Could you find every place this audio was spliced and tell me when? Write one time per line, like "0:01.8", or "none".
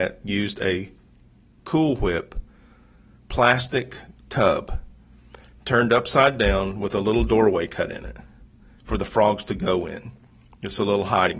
none